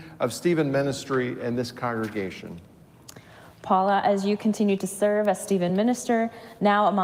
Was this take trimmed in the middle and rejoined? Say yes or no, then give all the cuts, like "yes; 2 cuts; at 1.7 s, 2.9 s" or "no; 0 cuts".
no; 0 cuts